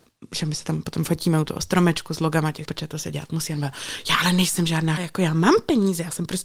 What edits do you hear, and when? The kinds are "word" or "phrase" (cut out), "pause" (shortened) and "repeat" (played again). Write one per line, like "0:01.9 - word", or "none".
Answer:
0:02.7 - word
0:05.0 - word